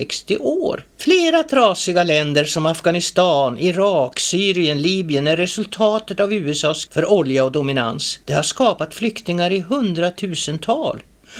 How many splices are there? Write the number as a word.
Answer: three